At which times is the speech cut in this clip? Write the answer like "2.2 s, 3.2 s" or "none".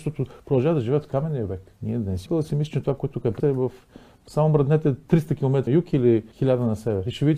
1.8 s, 2.3 s, 3.4 s, 5.7 s, 6.3 s